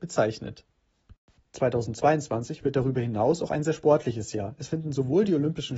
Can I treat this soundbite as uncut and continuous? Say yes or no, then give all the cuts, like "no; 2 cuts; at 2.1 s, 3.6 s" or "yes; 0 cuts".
yes; 0 cuts